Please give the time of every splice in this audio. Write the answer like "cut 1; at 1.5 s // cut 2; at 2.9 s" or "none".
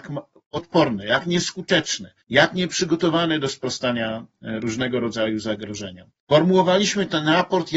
cut 1; at 2.2 s // cut 2; at 6.2 s